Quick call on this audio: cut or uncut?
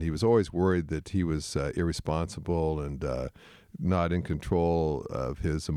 uncut